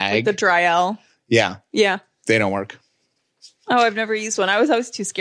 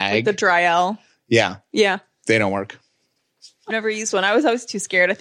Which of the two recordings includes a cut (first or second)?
second